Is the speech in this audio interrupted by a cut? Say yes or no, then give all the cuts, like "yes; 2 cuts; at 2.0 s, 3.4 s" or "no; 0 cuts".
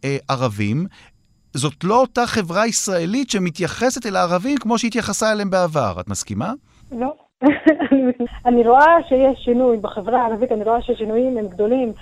no; 0 cuts